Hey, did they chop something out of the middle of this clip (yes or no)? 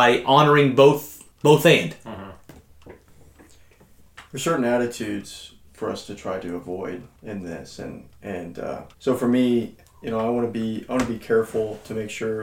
yes